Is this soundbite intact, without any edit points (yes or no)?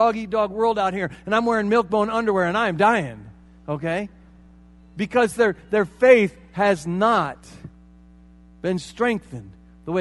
yes